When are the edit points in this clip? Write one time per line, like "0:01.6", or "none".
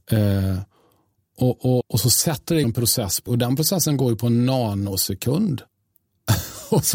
0:01.8
0:02.6
0:03.3
0:05.7